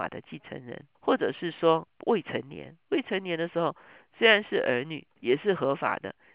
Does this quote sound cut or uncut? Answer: cut